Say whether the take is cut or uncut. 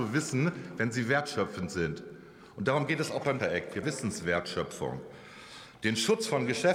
cut